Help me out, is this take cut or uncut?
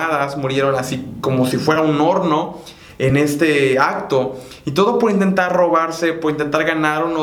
uncut